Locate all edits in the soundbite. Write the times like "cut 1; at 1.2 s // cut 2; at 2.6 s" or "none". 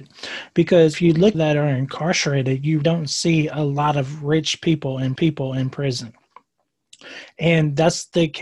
cut 1; at 0.9 s // cut 2; at 1.3 s // cut 3; at 2.8 s // cut 4; at 5.2 s